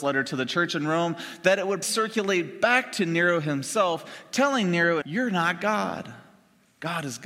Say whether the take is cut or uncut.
cut